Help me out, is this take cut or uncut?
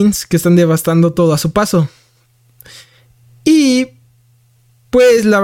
uncut